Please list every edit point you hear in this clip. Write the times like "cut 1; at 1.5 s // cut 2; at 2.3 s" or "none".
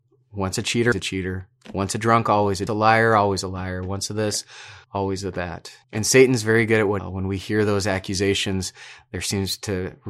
cut 1; at 0.9 s // cut 2; at 2.7 s // cut 3; at 4.8 s // cut 4; at 5.8 s // cut 5; at 7.0 s